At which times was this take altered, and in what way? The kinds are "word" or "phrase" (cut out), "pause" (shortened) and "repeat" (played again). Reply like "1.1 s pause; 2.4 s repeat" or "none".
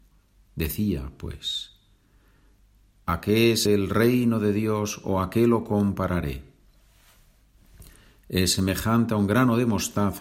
3.7 s word